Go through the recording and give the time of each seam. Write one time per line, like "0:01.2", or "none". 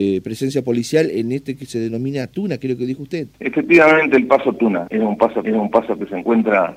0:03.3
0:04.9
0:05.4